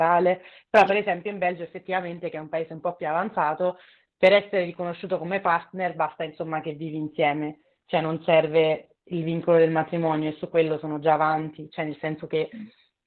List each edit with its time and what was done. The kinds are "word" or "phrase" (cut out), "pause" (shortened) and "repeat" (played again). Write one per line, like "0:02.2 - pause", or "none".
none